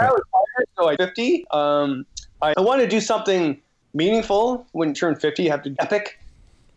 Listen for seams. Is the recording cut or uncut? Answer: cut